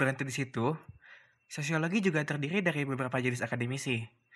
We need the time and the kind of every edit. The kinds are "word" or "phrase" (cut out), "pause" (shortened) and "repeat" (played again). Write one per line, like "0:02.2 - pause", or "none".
none